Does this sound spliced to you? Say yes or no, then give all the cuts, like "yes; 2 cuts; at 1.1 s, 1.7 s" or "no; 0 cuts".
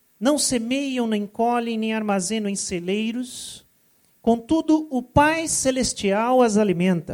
no; 0 cuts